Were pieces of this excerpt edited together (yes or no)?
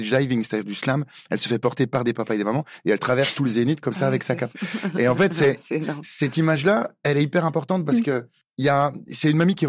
no